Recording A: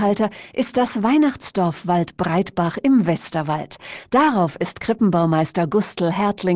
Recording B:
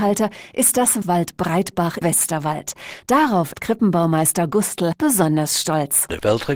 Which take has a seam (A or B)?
B